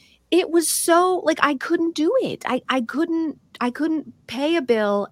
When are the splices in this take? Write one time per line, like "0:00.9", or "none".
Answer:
none